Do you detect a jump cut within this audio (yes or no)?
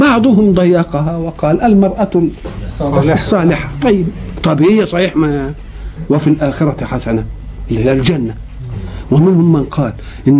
no